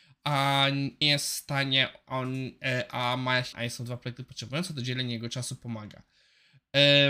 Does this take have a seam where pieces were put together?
yes; 2 cuts; at 1.0 s, 3.5 s

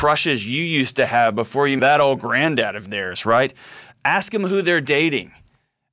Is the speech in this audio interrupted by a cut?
yes; 1 cut; at 1.8 s

